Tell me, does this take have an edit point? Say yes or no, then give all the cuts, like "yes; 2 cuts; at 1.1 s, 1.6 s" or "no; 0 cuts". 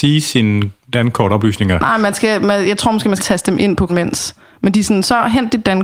yes; 2 cuts; at 3.2 s, 3.9 s